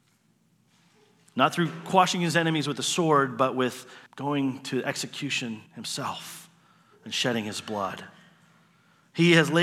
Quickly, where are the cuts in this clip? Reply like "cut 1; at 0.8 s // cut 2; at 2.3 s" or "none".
cut 1; at 4.1 s // cut 2; at 5.7 s